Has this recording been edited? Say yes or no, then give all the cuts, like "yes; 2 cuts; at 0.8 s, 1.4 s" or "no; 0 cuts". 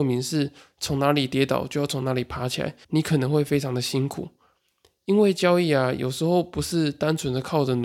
yes; 1 cut; at 2.8 s